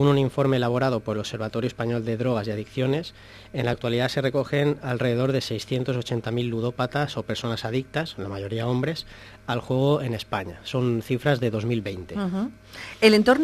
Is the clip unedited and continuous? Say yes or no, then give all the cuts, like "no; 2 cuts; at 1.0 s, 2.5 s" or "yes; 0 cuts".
yes; 0 cuts